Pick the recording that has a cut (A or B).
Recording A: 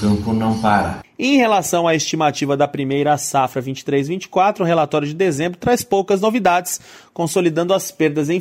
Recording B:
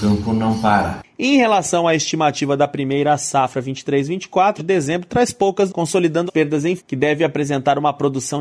B